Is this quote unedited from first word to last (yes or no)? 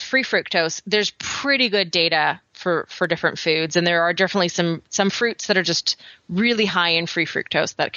yes